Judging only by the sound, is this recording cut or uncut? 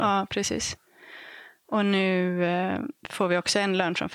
cut